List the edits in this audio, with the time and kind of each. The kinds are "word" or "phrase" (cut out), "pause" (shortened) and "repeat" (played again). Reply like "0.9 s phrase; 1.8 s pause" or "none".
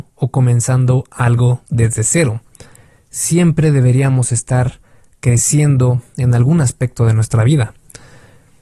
none